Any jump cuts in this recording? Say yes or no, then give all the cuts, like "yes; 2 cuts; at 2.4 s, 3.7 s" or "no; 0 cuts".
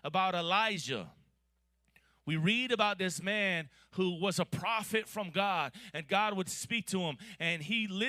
no; 0 cuts